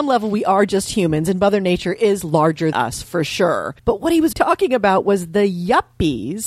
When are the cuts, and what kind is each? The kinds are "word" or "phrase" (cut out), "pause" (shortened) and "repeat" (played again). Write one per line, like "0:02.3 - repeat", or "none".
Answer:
0:02.7 - word
0:03.8 - pause
0:04.3 - word

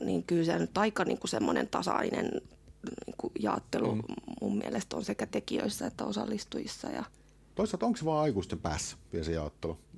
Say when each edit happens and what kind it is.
none

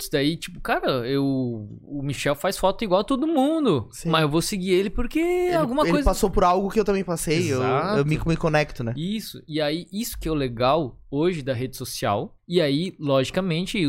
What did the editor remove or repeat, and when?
0:12.4 - pause

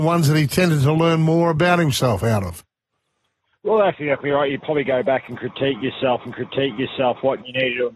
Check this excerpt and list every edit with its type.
0:06.3 - repeat

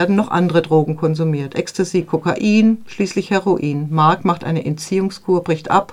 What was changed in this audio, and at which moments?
none

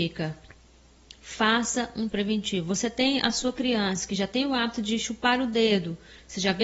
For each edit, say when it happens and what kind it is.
0:02.1 - word

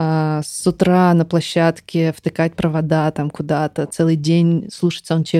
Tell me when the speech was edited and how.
none

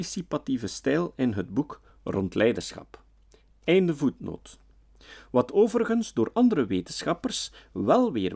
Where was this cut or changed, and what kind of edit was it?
none

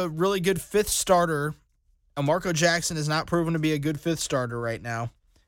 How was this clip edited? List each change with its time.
none

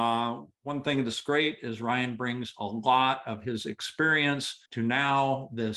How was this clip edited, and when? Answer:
0:04.7 - pause

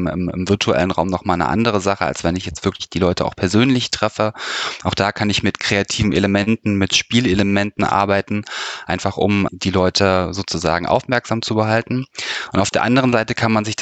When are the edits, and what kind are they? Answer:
0:09.5 - word

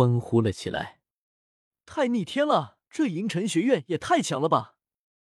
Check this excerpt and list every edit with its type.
0:02.9 - pause

